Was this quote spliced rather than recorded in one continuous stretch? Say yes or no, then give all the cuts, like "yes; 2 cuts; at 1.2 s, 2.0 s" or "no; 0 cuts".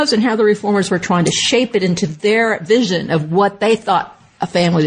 no; 0 cuts